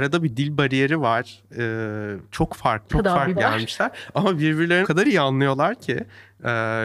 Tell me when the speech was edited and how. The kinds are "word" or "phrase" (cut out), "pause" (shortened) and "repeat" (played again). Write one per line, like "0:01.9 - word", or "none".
0:02.9 - word
0:03.4 - word
0:04.8 - word